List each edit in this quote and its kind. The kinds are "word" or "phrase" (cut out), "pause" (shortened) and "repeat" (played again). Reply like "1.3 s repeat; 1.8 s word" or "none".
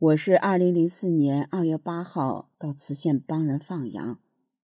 2.5 s pause